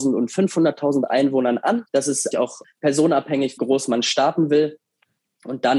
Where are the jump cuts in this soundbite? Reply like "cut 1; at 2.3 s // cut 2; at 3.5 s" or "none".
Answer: cut 1; at 1.9 s // cut 2; at 2.3 s // cut 3; at 3.6 s